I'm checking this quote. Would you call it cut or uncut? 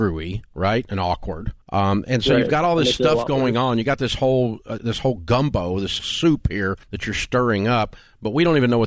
cut